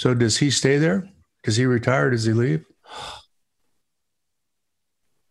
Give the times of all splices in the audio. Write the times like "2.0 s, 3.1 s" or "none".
1.2 s